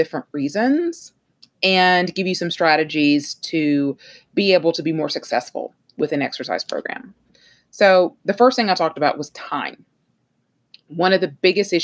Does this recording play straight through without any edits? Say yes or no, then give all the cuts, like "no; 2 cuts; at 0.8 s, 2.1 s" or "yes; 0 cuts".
yes; 0 cuts